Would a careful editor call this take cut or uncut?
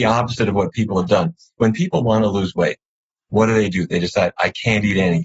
uncut